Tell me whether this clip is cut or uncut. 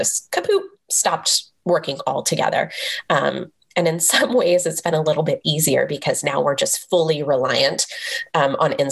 uncut